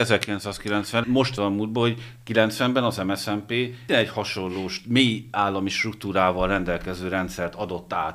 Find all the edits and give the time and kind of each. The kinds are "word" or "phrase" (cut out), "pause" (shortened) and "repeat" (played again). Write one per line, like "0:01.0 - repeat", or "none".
0:01.0 - phrase
0:01.4 - word
0:03.9 - word

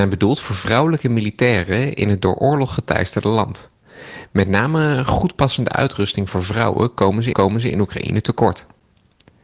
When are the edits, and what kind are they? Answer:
0:07.3 - repeat

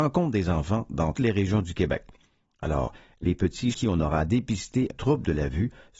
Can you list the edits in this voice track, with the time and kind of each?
0:01.1 - word
0:03.7 - word
0:04.9 - word

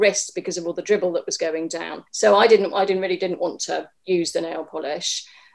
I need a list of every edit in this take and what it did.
0:02.1 - pause
0:04.0 - pause

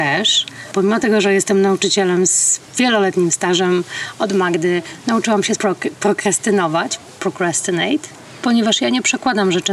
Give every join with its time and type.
0:02.7 - pause
0:05.6 - word

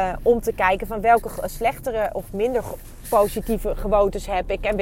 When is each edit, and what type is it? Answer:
none

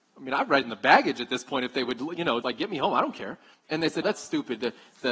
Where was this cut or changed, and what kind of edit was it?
0:02.4 - word
0:03.5 - pause
0:04.0 - word

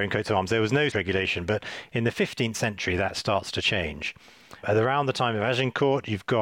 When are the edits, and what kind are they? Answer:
0:00.9 - word

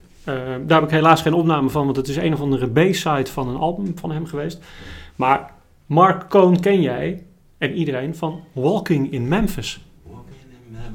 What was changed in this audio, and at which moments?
none

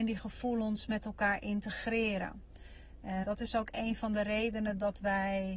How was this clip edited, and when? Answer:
0:03.2 - word

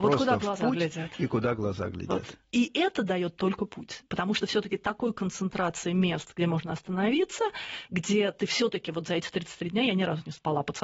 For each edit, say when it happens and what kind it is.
none

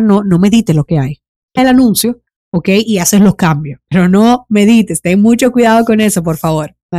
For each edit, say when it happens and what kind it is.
0:01.6 - word

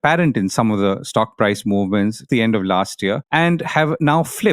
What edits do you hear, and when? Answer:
0:02.3 - word
0:03.3 - pause

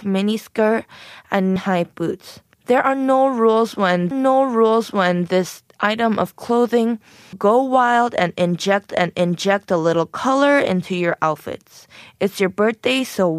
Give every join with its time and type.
0:01.6 - word
0:02.5 - pause
0:04.1 - repeat
0:07.3 - word
0:08.9 - repeat

